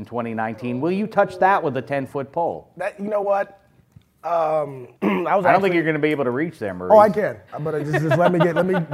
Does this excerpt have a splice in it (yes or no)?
yes